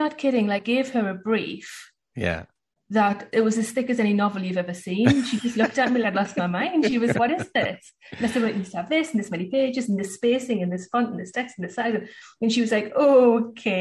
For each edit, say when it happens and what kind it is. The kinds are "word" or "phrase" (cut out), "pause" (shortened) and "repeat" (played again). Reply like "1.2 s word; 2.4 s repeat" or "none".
6.0 s word; 7.1 s word

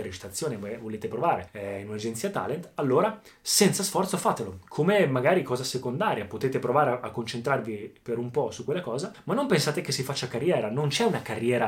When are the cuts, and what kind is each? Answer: none

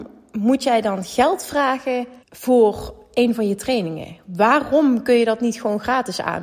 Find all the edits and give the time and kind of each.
2.2 s pause

